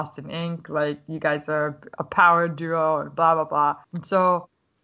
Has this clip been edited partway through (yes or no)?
yes